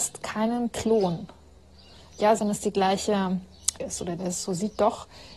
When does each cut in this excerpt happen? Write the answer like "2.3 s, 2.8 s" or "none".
2.4 s, 3.8 s, 4.2 s

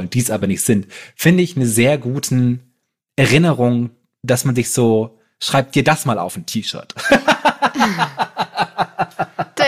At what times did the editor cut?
none

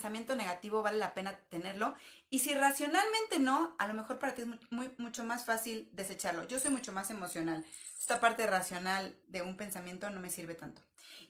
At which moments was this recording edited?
9.2 s

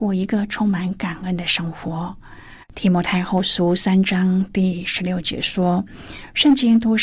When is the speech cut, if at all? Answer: 2.6 s

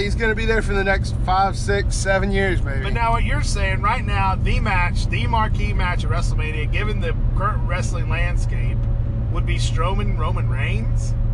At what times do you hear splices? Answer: none

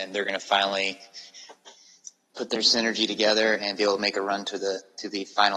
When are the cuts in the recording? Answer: none

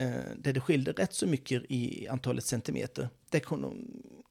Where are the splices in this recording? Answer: none

